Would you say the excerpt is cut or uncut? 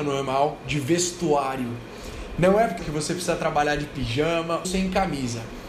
cut